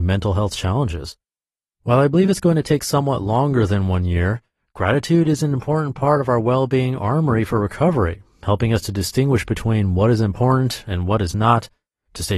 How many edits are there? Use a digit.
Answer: 0